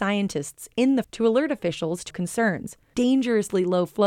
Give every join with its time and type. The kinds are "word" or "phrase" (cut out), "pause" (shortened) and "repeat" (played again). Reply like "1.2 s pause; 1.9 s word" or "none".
1.0 s word; 2.1 s word; 2.9 s word